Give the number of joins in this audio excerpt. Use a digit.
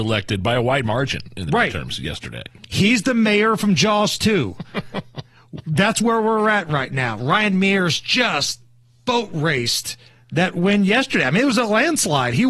0